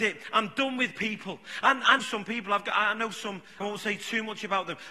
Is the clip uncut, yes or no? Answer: no